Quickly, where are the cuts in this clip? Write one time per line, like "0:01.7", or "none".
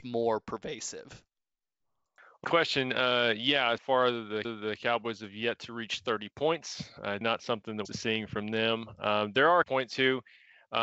0:02.4
0:03.8
0:04.4
0:07.2
0:07.8
0:09.6